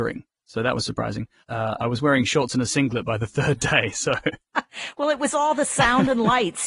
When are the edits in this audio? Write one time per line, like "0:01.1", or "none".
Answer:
none